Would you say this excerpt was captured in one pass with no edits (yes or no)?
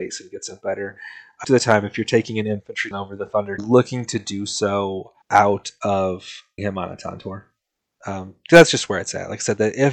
no